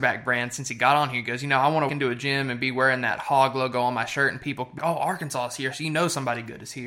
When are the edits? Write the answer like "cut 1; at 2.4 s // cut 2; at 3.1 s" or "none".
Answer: cut 1; at 1.9 s // cut 2; at 4.8 s